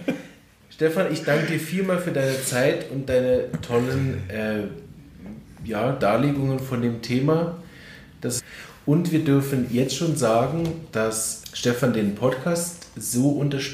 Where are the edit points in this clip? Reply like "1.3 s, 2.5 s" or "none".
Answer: 11.4 s

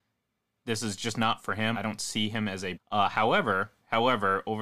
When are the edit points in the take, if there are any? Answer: 1.7 s, 2.8 s

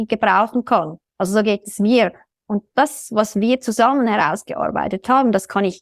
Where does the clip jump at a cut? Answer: 2.7 s

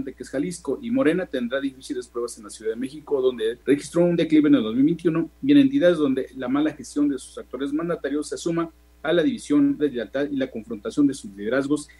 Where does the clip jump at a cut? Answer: 3.6 s, 9.8 s

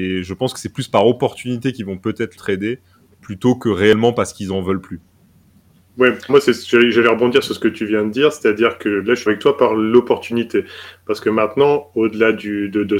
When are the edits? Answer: 2.4 s, 6.3 s, 9.3 s

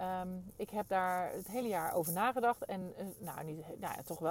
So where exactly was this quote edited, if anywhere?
none

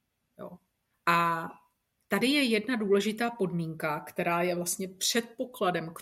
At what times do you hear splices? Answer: none

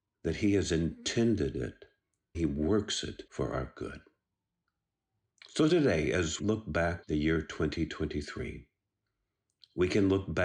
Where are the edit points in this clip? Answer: 2.3 s, 3.3 s, 6.4 s, 7.0 s

